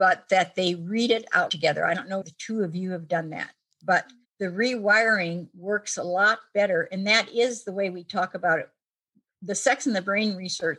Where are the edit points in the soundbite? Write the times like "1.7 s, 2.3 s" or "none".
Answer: 1.5 s, 2.2 s, 4.2 s